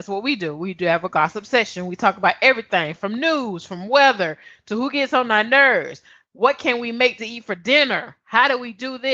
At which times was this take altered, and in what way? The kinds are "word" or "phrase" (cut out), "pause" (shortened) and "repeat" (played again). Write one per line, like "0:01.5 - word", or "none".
none